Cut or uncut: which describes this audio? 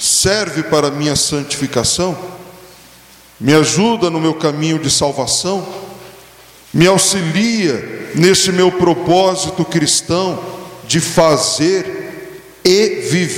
uncut